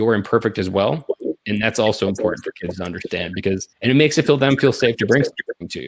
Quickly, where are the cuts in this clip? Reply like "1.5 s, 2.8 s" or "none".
3.7 s